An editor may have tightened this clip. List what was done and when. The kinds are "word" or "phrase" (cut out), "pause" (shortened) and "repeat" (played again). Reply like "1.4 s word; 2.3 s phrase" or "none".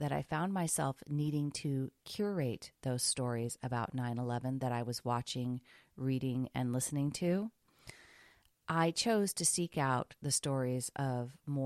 none